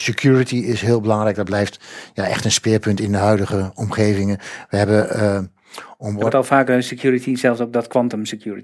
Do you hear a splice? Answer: no; 0 cuts

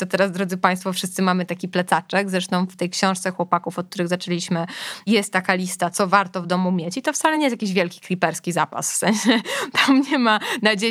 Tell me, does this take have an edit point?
no; 0 cuts

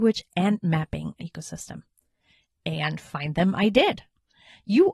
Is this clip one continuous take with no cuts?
no; 1 cut; at 1.2 s

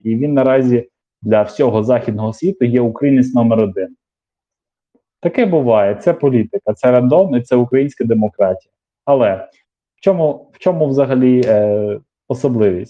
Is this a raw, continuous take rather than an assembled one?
yes; 0 cuts

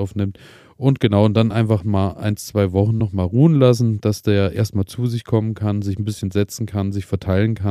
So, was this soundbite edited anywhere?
no; 0 cuts

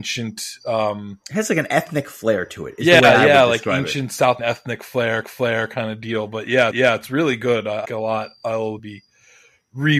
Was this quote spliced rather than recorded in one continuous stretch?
yes; 6 cuts; at 1.2 s, 4.4 s, 5.2 s, 6.7 s, 7.8 s, 8.8 s

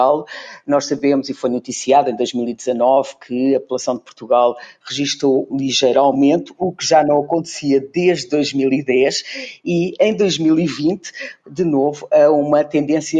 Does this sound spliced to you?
yes; 2 cuts; at 5.5 s, 11.4 s

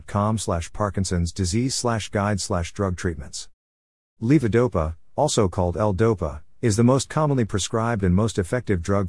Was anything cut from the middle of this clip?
no; 0 cuts

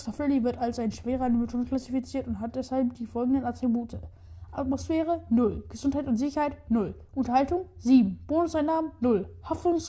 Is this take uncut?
yes; 0 cuts

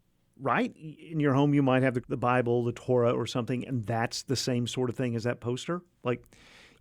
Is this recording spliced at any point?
yes; 1 cut; at 2.0 s

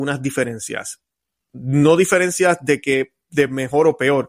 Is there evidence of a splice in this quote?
no; 0 cuts

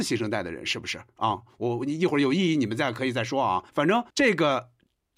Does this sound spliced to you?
yes; 2 cuts; at 3.7 s, 4.1 s

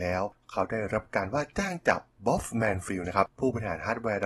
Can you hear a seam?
no; 0 cuts

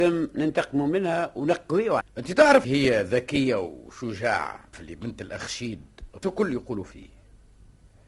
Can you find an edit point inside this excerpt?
yes; 4 cuts; at 2.0 s, 2.6 s, 4.7 s, 6.2 s

